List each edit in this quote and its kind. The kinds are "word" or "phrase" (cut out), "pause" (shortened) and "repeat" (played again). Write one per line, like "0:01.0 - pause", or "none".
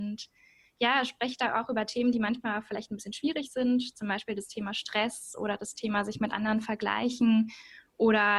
none